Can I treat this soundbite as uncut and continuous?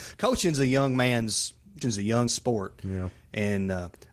no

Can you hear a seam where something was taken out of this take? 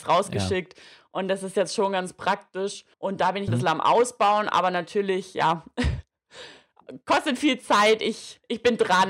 yes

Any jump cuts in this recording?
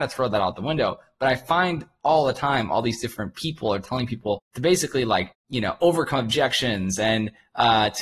yes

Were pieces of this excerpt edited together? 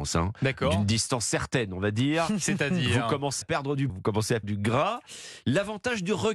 yes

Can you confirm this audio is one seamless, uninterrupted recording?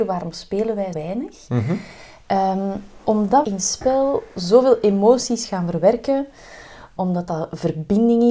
no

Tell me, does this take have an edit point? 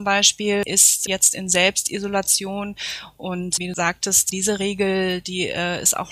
no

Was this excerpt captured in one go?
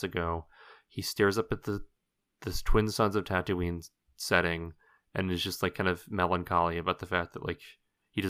yes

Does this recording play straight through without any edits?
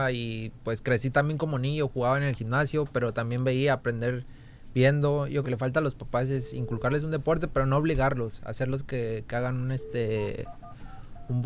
no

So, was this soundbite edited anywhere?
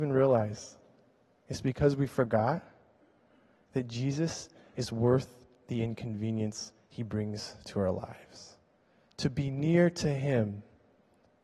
no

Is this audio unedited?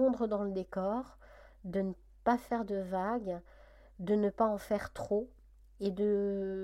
yes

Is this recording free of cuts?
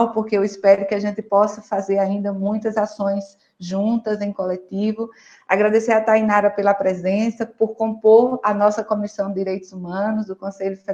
yes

